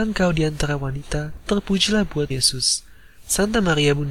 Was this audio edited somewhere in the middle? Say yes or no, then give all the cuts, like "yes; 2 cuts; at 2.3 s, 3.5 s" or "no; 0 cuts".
yes; 2 cuts; at 1.5 s, 2.3 s